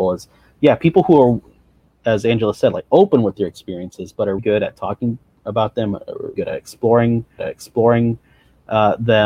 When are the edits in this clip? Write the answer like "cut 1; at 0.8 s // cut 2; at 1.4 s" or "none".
cut 1; at 4.4 s // cut 2; at 6.4 s // cut 3; at 7.4 s